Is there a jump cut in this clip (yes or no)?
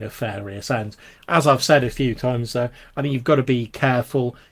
no